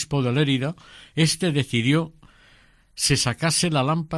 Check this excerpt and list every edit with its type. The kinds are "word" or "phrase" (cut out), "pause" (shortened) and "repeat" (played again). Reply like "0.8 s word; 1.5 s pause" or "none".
none